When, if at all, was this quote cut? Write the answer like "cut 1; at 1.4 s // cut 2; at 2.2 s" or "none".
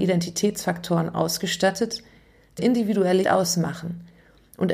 cut 1; at 2.6 s // cut 2; at 3.2 s